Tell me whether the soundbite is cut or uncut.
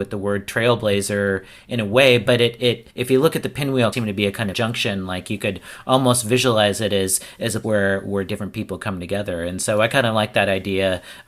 cut